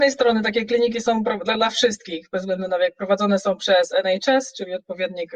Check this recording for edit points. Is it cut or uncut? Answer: uncut